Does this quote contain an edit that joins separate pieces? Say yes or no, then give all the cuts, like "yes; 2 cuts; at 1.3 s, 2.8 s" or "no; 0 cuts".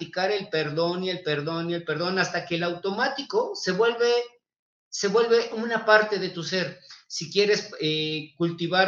no; 0 cuts